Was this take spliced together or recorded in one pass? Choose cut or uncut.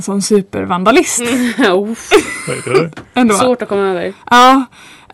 cut